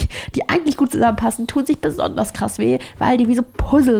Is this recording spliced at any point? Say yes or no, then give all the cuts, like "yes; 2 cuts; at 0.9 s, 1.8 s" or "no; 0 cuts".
no; 0 cuts